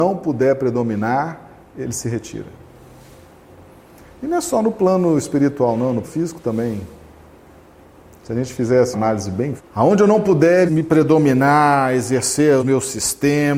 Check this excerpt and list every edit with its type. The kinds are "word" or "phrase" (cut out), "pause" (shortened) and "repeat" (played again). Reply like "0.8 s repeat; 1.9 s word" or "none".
6.0 s word; 8.9 s word; 9.6 s word; 10.7 s word; 12.6 s word